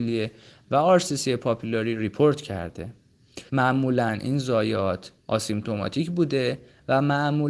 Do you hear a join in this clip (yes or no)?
yes